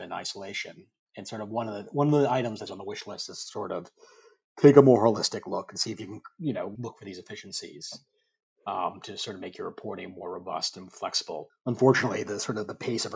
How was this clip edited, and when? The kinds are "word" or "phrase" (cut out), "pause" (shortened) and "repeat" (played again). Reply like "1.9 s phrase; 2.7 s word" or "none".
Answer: 2.7 s word; 6.8 s word; 11.5 s word